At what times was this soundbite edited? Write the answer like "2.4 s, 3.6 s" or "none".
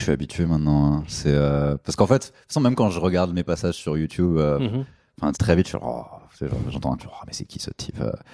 5.3 s, 7.0 s